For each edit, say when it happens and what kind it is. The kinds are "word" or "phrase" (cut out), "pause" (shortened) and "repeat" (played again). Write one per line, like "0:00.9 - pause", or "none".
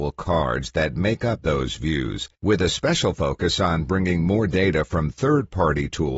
0:02.3 - pause